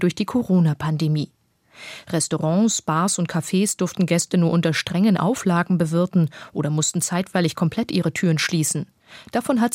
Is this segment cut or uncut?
uncut